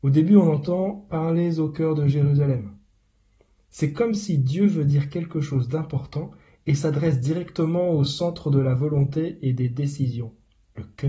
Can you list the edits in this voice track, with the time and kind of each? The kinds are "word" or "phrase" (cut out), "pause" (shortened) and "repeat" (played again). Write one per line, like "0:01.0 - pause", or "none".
none